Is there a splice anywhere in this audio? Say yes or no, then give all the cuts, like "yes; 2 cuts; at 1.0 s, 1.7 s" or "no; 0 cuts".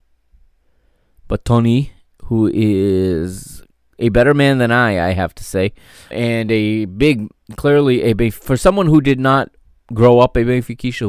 yes; 1 cut; at 6.1 s